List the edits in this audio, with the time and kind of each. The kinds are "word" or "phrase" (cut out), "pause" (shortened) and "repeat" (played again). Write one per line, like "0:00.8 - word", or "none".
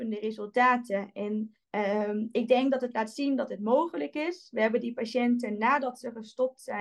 0:01.6 - pause